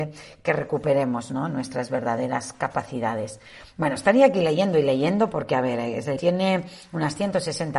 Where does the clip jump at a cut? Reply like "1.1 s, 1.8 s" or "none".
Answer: 6.2 s